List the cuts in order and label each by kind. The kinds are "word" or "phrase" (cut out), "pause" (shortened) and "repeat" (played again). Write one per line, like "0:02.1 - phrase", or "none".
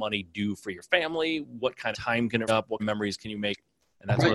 0:01.9 - word
0:02.5 - word
0:02.8 - word